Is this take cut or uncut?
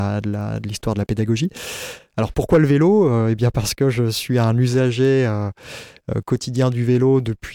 uncut